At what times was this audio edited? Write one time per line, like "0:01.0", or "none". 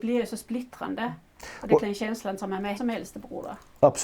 0:01.8
0:02.8